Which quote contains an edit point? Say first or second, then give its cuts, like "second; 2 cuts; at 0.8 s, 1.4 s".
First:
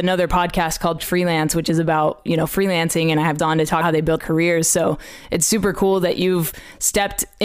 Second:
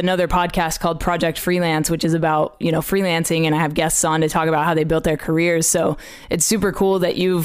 first; 4 cuts; at 1.0 s, 3.4 s, 3.8 s, 4.2 s